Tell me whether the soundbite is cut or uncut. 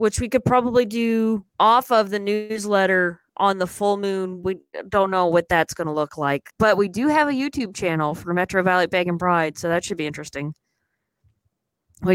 cut